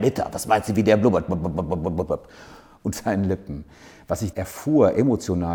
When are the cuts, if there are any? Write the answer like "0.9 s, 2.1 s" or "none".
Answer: 2.9 s, 4.3 s